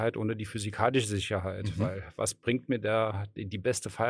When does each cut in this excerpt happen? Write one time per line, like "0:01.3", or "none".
none